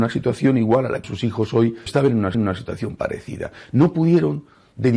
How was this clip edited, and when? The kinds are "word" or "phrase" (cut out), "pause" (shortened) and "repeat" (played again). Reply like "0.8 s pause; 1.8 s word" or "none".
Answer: 1.0 s word; 1.9 s word; 2.3 s repeat